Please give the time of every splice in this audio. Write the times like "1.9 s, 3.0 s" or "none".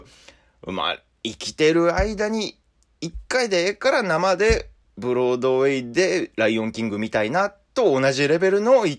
none

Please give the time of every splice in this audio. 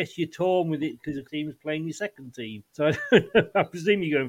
1.2 s, 2.7 s

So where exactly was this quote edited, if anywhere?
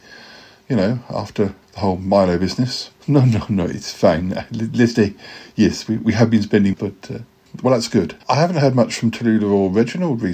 1.6 s, 3.0 s, 4.9 s, 6.0 s, 6.7 s, 8.2 s

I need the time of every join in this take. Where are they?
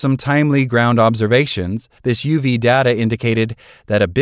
2.0 s

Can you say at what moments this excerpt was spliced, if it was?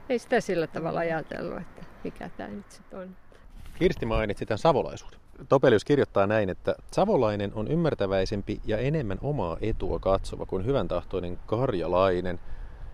none

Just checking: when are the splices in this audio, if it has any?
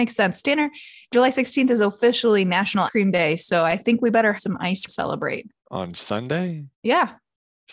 2.9 s, 4.4 s, 4.9 s, 5.6 s, 6.7 s

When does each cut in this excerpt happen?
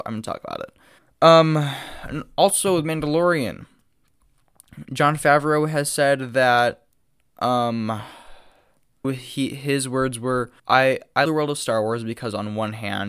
1.0 s, 9.0 s, 10.6 s, 11.3 s

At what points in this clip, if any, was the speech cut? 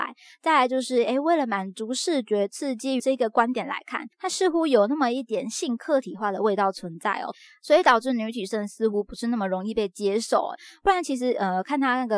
4.1 s

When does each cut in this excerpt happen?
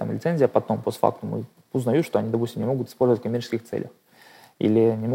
none

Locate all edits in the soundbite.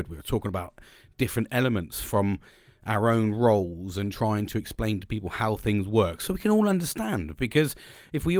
none

